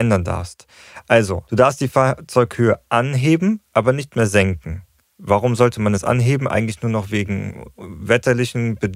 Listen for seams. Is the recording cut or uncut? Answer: uncut